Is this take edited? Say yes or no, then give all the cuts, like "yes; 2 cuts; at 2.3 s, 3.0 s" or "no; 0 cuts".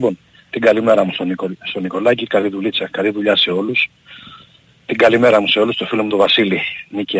no; 0 cuts